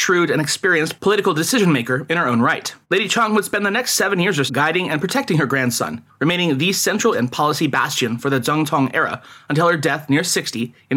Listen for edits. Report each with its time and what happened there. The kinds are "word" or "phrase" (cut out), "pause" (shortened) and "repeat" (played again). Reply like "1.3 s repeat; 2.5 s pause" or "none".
2.8 s pause; 4.5 s word; 7.1 s word

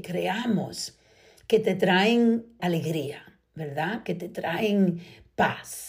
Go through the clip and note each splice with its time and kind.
2.6 s word

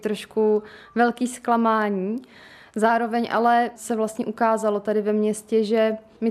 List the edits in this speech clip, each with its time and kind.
3.8 s word

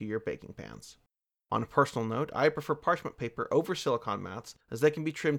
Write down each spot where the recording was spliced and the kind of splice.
none

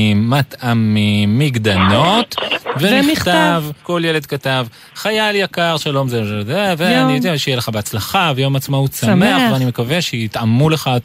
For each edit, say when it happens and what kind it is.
3.8 s pause

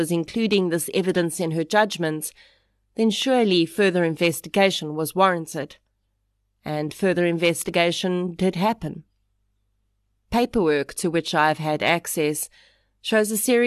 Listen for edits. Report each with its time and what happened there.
none

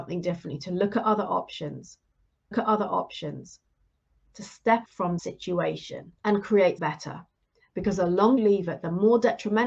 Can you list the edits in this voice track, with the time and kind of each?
2.5 s repeat; 4.9 s word; 5.2 s word; 6.2 s pause; 6.8 s word; 8.4 s word

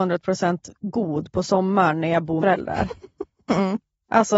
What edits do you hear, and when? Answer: 2.4 s phrase

